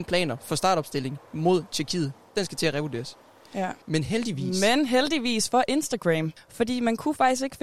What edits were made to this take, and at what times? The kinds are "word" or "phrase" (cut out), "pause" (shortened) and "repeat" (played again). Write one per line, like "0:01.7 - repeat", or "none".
0:03.8 - pause
0:06.4 - pause